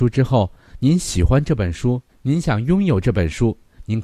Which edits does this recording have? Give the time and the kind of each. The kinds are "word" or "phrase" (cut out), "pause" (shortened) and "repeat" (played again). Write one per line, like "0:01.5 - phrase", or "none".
0:02.1 - pause